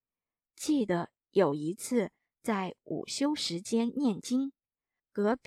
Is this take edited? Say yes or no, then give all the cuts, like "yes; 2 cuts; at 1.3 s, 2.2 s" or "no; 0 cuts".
no; 0 cuts